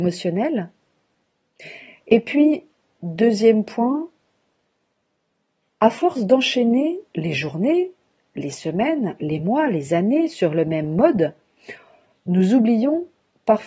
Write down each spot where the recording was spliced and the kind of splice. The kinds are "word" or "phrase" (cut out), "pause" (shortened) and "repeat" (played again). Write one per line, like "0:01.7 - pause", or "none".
none